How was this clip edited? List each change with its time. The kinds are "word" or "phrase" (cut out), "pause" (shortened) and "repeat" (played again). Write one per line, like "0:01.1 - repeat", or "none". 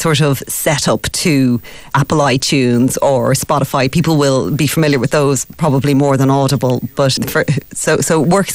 0:01.9 - word
0:07.2 - word